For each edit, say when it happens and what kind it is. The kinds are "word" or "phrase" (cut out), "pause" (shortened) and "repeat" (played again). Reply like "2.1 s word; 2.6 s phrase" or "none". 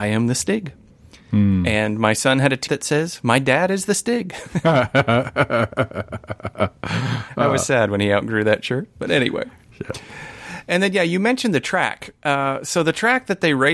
2.7 s word